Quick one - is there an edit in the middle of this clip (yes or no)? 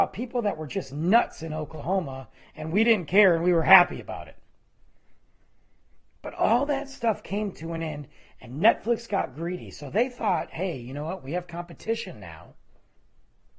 no